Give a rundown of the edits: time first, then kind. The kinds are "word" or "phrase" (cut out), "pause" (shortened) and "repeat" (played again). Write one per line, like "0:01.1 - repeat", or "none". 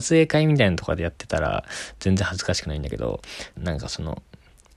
0:03.6 - phrase